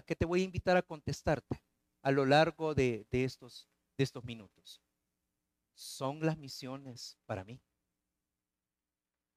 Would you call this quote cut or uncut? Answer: uncut